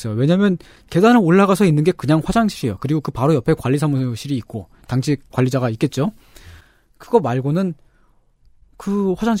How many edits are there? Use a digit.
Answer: 0